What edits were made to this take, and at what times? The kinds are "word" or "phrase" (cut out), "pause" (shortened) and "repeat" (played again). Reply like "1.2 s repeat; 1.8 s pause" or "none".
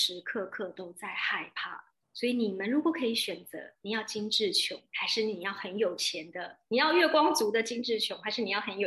2.0 s pause; 4.9 s pause